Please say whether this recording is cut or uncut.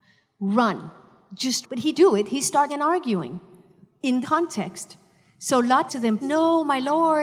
cut